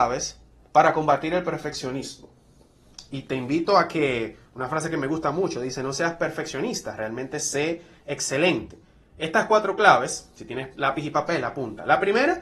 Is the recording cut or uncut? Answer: uncut